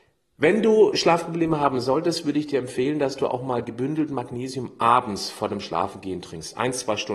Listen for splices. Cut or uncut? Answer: uncut